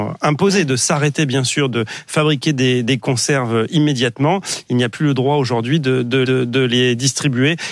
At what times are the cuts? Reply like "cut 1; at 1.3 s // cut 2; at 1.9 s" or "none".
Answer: cut 1; at 4.9 s // cut 2; at 6.2 s